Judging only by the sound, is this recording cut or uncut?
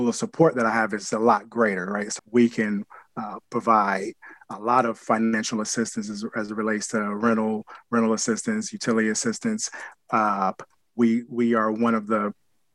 cut